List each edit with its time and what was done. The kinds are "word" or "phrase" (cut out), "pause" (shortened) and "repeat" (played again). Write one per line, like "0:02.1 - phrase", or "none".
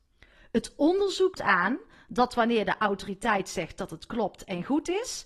0:01.4 - word